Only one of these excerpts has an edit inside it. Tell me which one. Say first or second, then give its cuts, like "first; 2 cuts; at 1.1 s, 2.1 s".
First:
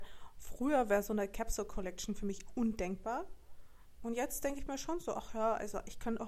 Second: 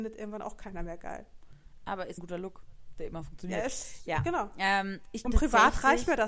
second; 2 cuts; at 2.2 s, 5.2 s